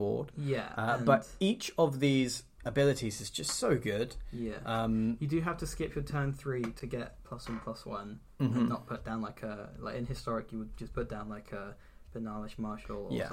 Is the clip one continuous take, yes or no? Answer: yes